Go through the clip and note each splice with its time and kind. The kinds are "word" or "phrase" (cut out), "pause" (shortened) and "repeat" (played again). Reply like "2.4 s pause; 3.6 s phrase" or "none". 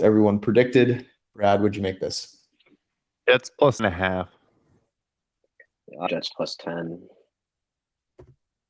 3.8 s word; 6.1 s word